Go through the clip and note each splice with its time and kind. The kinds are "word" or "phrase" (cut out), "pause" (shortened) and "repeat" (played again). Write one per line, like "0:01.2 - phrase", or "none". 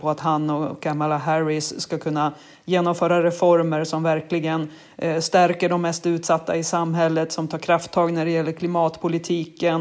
none